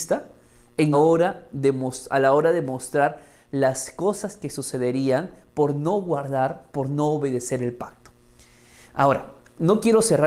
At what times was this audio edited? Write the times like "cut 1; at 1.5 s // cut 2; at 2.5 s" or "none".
cut 1; at 0.9 s